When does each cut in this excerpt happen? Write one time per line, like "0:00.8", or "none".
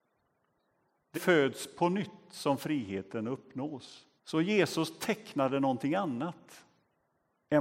0:01.1
0:04.2